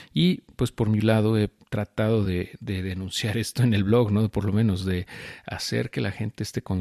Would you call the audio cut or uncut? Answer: uncut